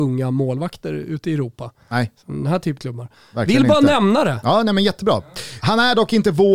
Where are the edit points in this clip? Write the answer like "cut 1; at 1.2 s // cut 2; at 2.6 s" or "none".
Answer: cut 1; at 2.8 s